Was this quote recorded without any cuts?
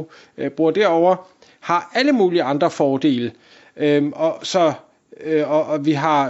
yes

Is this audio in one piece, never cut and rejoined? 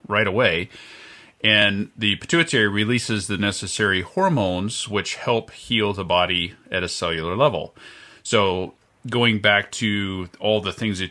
yes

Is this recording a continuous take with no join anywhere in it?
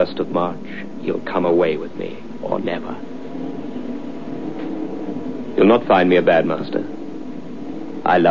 yes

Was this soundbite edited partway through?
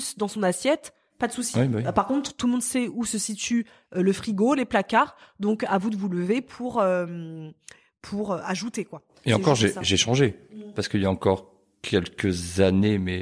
no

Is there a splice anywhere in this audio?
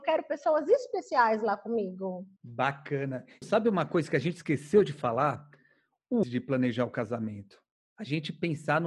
yes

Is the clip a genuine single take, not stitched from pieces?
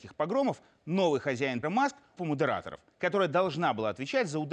no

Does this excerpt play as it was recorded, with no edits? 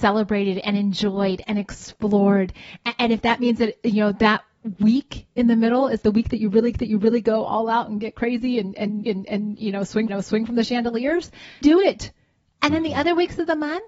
no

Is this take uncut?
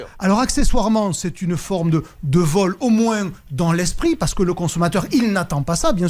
yes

